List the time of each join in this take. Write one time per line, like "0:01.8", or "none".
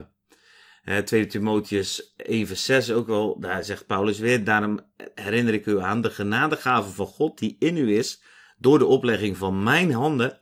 none